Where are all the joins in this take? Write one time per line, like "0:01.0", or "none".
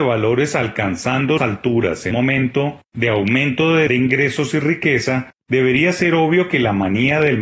0:01.4
0:02.1
0:03.9